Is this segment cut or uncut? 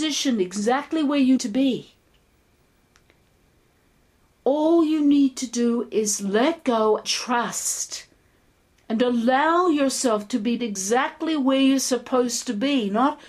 cut